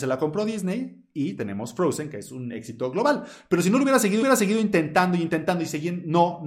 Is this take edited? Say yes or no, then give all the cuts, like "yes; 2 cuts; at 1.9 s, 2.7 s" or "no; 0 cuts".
yes; 1 cut; at 4.2 s